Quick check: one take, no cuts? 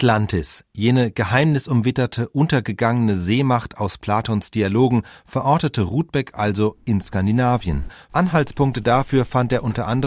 yes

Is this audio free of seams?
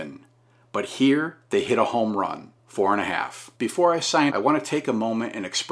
no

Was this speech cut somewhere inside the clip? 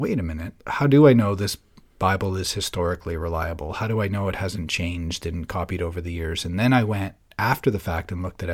no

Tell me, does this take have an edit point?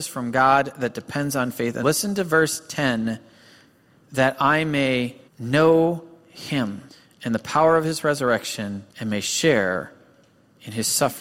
yes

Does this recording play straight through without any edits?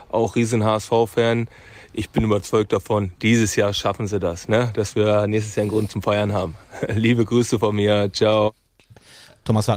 yes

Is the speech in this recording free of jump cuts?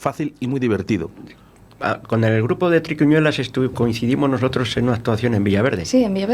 yes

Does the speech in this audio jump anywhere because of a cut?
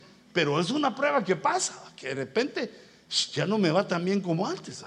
no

